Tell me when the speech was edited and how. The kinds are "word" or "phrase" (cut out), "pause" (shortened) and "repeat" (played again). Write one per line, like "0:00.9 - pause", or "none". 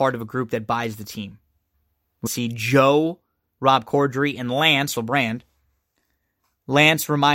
0:02.3 - word
0:05.0 - word